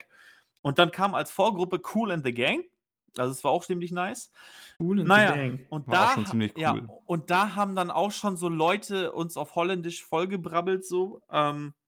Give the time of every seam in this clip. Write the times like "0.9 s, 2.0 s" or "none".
3.7 s, 4.7 s